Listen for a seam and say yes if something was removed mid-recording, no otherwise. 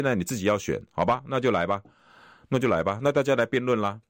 no